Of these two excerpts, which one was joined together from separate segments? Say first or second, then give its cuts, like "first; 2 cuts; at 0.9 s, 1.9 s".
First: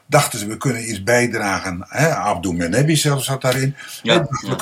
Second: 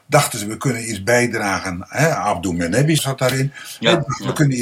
second; 1 cut; at 3.0 s